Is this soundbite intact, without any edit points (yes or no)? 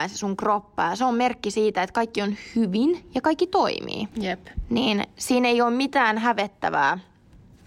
no